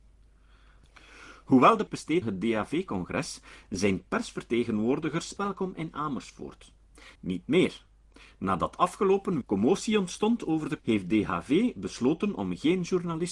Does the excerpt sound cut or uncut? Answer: cut